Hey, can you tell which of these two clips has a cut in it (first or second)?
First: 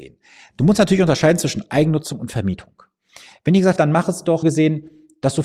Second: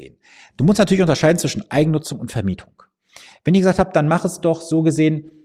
first